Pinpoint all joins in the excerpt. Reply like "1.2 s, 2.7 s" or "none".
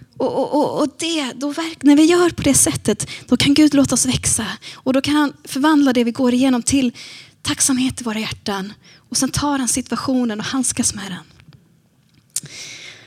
none